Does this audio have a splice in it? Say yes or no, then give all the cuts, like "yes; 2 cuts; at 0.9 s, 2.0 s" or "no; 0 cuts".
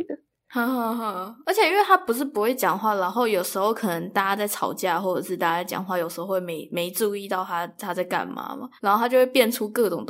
yes; 1 cut; at 8.8 s